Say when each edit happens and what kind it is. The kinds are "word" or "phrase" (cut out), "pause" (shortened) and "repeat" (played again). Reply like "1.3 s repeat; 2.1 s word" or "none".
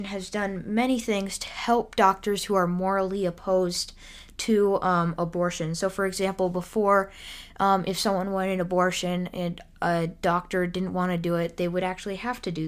none